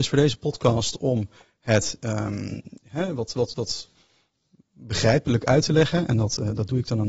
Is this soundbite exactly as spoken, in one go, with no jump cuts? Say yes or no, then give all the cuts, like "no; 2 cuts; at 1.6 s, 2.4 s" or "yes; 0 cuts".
yes; 0 cuts